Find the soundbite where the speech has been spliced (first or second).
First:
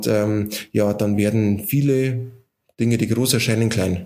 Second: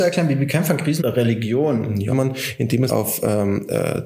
second